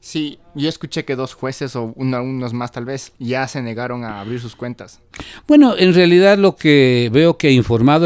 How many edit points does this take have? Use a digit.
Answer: 1